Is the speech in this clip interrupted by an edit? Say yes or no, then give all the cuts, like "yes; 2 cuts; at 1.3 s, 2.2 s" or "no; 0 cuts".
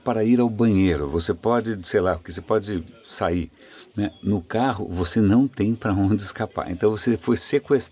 no; 0 cuts